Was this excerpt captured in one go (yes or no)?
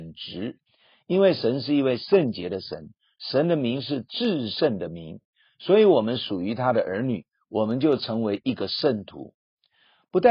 yes